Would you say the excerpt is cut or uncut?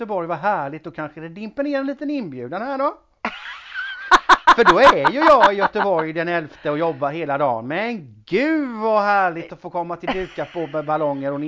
uncut